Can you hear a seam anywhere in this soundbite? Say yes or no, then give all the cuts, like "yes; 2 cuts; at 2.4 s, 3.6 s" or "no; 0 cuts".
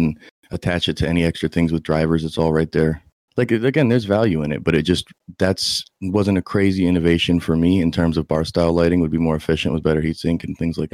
no; 0 cuts